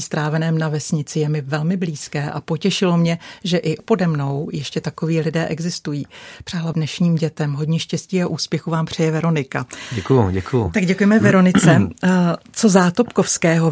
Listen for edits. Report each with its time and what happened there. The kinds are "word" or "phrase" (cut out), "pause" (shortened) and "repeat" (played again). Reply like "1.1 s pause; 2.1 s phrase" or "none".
3.8 s word; 6.7 s phrase